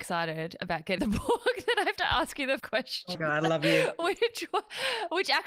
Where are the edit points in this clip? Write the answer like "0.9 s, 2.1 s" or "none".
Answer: 1.0 s, 2.0 s, 2.6 s, 3.1 s